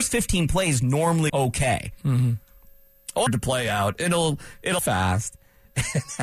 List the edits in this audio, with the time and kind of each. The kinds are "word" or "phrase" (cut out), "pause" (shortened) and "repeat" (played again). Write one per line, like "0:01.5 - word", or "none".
0:01.3 - word
0:03.3 - phrase
0:04.8 - word